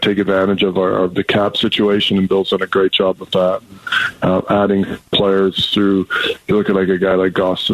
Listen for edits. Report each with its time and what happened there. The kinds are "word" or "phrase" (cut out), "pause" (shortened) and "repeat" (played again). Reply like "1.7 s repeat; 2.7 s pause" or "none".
none